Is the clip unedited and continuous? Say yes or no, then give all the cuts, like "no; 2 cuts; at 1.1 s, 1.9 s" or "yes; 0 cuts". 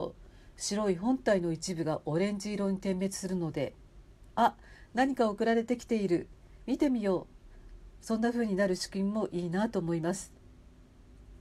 yes; 0 cuts